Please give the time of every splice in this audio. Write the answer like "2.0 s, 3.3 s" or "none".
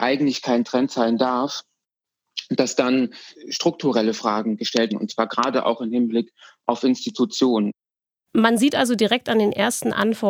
3.3 s, 4.9 s